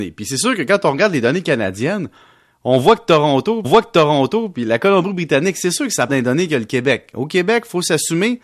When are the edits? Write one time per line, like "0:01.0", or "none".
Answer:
0:03.6
0:06.1